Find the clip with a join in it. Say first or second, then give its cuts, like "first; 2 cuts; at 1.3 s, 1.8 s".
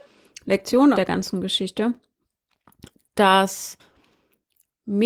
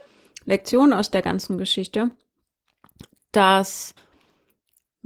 first; 1 cut; at 0.9 s